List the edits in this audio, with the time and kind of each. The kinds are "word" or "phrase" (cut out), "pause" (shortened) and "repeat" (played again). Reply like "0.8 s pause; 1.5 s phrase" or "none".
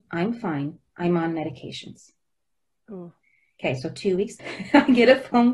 4.4 s word